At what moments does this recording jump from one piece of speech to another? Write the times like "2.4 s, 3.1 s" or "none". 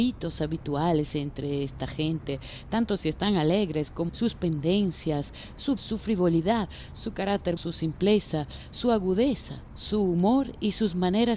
4.1 s, 5.8 s, 7.6 s